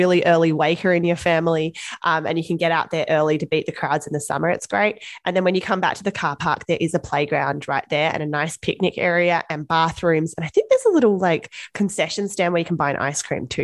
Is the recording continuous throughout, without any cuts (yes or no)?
yes